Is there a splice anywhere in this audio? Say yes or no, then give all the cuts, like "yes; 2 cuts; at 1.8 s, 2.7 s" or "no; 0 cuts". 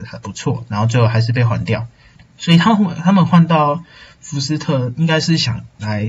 yes; 1 cut; at 2.2 s